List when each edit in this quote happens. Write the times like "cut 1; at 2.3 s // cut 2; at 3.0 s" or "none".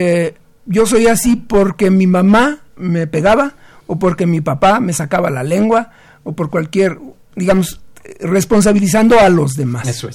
cut 1; at 2.7 s